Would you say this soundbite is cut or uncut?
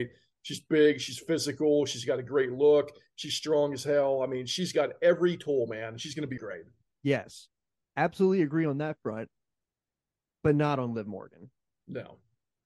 cut